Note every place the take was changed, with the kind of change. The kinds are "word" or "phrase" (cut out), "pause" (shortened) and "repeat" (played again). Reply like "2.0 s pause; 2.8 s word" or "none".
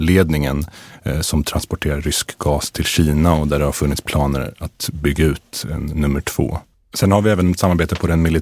none